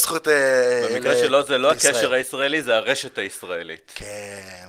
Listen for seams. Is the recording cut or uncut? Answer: uncut